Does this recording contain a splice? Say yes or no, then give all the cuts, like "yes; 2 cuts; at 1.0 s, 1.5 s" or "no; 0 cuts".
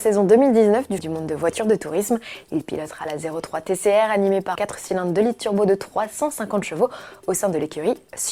yes; 2 cuts; at 1.0 s, 4.6 s